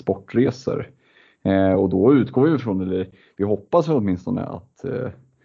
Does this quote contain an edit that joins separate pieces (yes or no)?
no